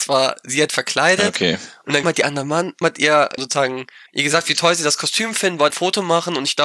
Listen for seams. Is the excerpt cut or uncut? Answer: cut